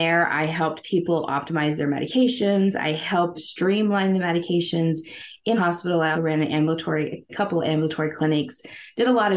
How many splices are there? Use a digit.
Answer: 4